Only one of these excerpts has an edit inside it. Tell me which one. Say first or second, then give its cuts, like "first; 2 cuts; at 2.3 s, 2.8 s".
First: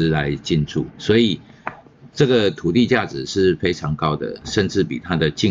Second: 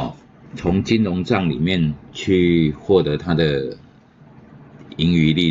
first; 1 cut; at 0.9 s